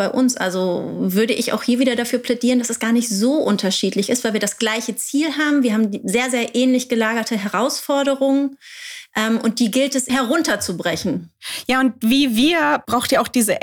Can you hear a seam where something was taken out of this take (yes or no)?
yes